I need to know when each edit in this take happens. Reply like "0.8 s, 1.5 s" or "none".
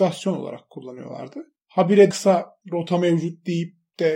2.1 s, 2.6 s